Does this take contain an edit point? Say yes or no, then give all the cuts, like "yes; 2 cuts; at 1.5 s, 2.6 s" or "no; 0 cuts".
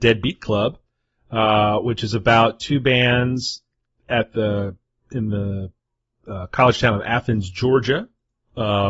no; 0 cuts